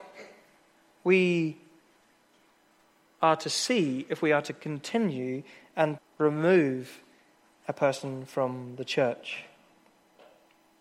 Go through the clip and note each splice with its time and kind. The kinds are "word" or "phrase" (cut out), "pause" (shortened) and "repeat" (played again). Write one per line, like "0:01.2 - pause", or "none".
0:06.0 - word

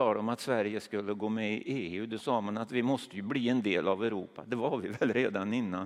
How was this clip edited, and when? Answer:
none

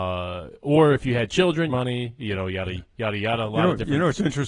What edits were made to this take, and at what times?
0:01.7 - phrase

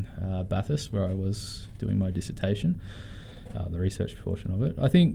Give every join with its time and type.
none

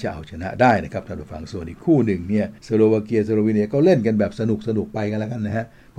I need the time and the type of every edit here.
0:02.6 - pause

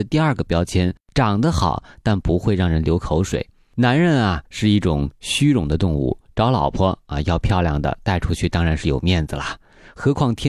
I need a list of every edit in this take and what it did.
0:01.0 - pause
0:04.5 - pause

